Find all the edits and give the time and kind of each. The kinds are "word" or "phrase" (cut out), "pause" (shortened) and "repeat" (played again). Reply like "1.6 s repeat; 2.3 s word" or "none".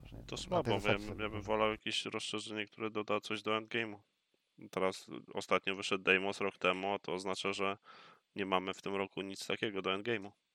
none